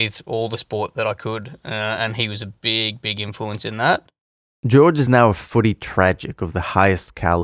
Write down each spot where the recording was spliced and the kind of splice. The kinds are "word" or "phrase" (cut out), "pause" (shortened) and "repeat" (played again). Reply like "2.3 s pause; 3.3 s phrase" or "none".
none